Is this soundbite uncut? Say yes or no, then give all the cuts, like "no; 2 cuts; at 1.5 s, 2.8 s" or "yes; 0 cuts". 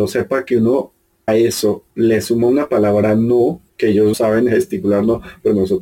no; 4 cuts; at 1.3 s, 1.9 s, 3.7 s, 4.1 s